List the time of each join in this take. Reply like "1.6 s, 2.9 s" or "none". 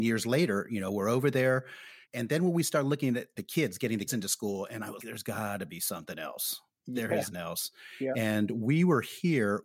2.0 s, 3.4 s, 4.1 s, 5.0 s, 7.3 s